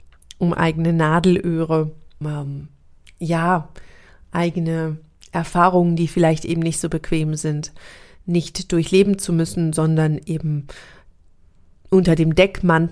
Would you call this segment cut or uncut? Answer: cut